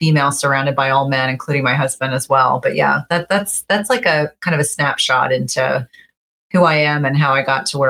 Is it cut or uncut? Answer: uncut